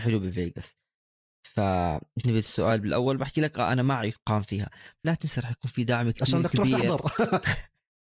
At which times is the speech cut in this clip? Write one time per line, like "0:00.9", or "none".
0:02.2
0:05.0